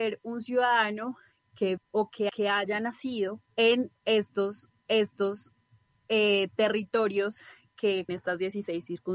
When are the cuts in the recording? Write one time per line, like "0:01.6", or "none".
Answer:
0:01.8
0:02.3
0:03.5
0:04.8
0:08.1